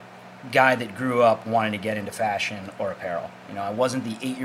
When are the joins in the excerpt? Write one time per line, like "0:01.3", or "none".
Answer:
none

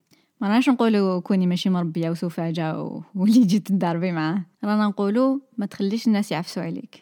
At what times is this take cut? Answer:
0:04.5

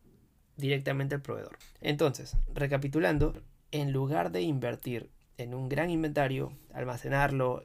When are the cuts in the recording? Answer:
none

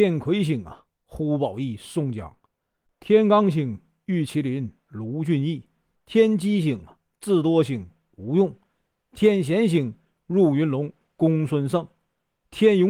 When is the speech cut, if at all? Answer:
0:05.9

